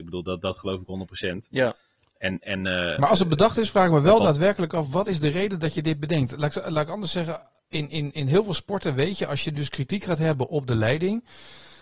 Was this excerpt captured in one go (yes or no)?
yes